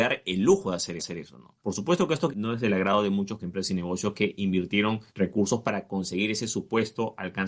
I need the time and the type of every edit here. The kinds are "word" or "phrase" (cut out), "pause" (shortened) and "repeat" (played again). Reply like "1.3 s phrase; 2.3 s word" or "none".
1.0 s repeat; 1.6 s pause; 2.3 s word; 3.4 s phrase; 5.1 s pause

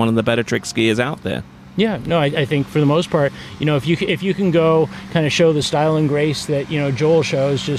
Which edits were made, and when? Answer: none

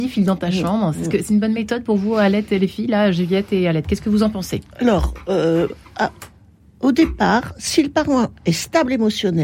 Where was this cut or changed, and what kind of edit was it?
none

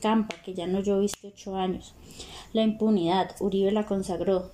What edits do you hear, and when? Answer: none

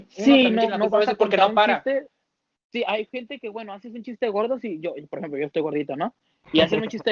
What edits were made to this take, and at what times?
none

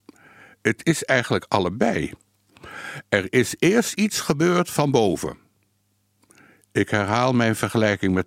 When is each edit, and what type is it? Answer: none

